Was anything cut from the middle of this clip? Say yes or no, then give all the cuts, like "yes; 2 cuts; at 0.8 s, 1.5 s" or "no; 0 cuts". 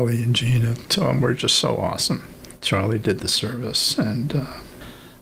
no; 0 cuts